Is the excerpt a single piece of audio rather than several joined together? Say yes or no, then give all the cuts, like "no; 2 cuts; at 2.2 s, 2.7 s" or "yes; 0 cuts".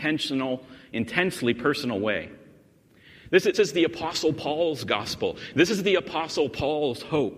no; 1 cut; at 3.5 s